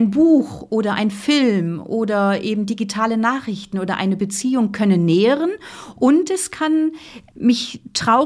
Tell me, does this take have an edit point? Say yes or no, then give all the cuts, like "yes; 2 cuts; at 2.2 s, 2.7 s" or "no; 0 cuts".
no; 0 cuts